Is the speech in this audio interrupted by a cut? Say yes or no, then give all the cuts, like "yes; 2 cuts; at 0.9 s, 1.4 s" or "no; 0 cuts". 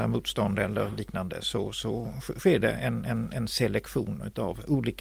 no; 0 cuts